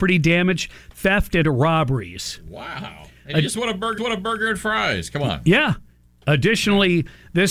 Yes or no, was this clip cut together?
yes